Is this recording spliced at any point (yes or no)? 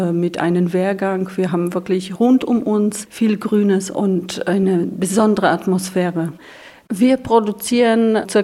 no